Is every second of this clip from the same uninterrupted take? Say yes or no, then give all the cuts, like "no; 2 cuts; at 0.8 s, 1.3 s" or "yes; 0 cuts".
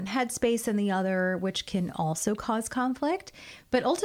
yes; 0 cuts